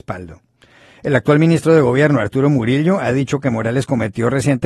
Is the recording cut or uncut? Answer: uncut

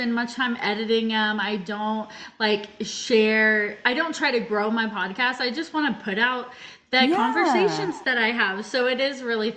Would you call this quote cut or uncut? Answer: uncut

